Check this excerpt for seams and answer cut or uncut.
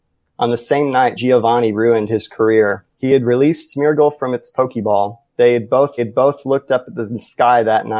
cut